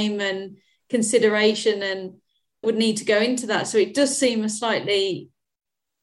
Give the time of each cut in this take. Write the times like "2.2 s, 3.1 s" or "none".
2.6 s